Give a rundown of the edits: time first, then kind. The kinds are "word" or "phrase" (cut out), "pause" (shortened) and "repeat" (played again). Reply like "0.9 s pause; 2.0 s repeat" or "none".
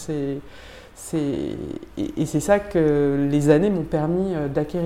none